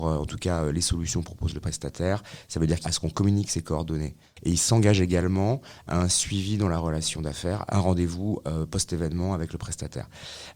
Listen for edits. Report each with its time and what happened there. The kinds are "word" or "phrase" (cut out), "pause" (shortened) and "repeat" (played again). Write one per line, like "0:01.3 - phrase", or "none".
0:02.8 - phrase
0:07.7 - phrase